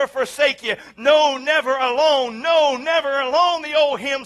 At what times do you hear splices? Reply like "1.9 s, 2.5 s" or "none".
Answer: none

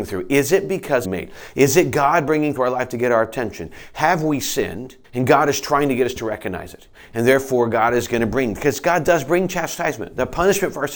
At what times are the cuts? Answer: 1.0 s, 2.6 s, 5.0 s

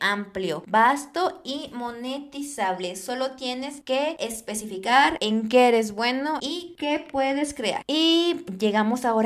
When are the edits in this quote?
none

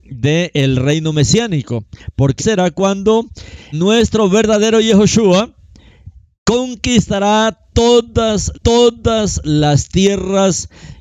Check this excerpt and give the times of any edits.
2.4 s, 3.7 s, 8.5 s

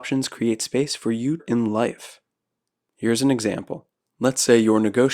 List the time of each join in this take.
1.4 s, 2.6 s, 4.1 s

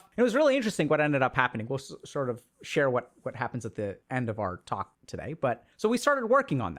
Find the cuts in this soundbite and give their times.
4.0 s, 4.9 s, 5.7 s

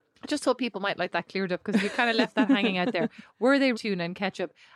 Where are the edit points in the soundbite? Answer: 3.7 s

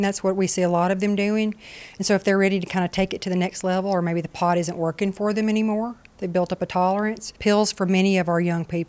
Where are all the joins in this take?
7.4 s

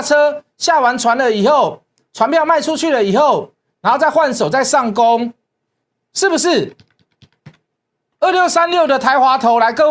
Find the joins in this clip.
none

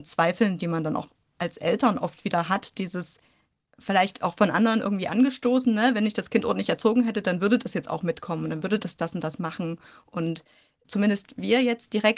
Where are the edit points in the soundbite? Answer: none

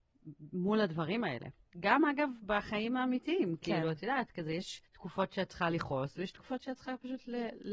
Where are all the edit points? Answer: 4.9 s

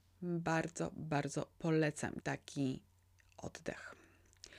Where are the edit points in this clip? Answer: 2.2 s

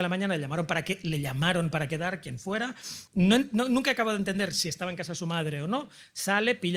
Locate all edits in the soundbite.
3.1 s

